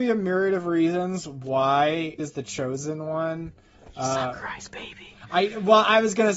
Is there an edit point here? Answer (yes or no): yes